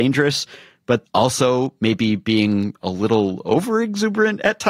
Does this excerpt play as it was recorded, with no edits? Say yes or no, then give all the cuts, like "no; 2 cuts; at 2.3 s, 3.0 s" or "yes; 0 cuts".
no; 1 cut; at 1.0 s